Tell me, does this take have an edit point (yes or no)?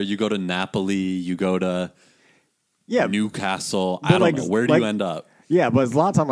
no